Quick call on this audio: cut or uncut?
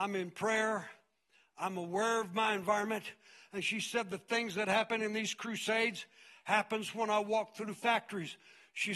uncut